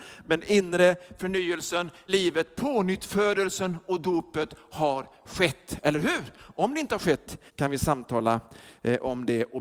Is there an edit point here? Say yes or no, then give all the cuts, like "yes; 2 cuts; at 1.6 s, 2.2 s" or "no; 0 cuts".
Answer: yes; 2 cuts; at 2.1 s, 7.5 s